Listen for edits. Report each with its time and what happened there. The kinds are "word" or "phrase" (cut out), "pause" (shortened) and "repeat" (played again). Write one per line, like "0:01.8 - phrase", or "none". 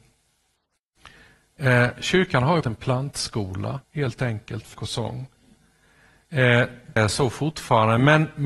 0:02.6 - word
0:03.8 - pause
0:04.7 - word
0:07.0 - phrase